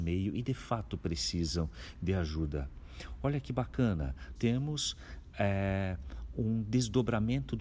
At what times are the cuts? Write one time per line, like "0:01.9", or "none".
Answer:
0:04.4

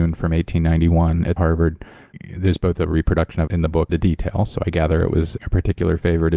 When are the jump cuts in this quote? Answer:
0:01.4
0:03.5
0:03.9

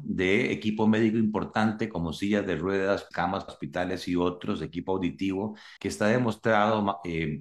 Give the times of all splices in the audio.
0:03.1
0:03.5
0:05.8

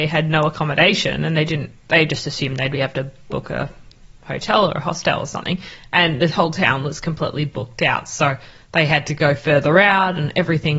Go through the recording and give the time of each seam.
none

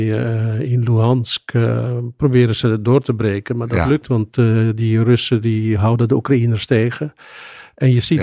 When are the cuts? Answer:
0:04.0

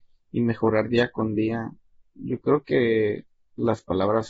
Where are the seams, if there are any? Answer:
none

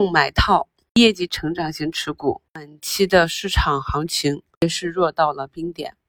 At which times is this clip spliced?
0:02.5

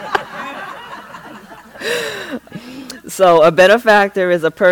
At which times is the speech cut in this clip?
0:02.5

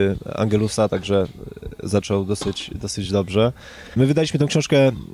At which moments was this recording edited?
none

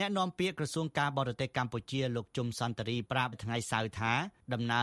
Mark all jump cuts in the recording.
0:03.3

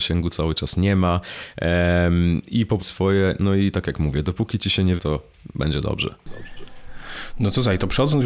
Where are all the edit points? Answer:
0:02.8
0:05.0

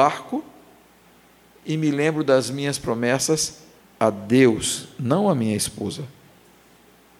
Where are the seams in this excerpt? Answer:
0:03.8

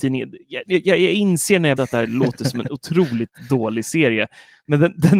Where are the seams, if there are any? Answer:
0:01.8

